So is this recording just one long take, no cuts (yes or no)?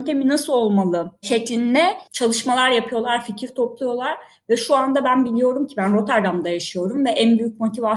yes